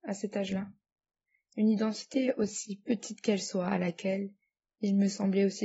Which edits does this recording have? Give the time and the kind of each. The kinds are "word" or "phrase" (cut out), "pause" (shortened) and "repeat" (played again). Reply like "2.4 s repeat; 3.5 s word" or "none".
none